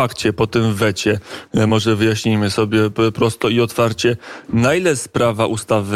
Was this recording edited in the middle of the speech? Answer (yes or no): no